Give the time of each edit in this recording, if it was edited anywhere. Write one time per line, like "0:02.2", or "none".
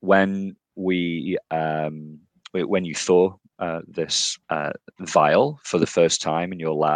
0:04.4